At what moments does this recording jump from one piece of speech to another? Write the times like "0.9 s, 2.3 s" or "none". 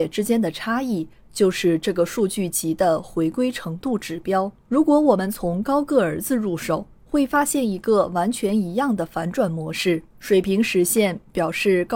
4.6 s, 7.0 s, 10.1 s

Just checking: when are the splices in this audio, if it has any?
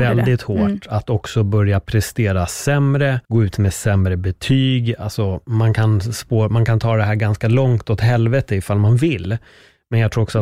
3.2 s

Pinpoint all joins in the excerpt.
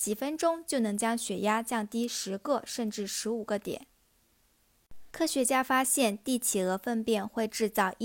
5.1 s

